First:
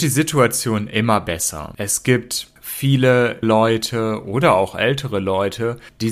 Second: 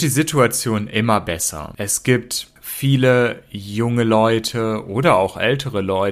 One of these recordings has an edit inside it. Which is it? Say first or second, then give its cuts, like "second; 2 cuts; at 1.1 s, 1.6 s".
first; 1 cut; at 3.4 s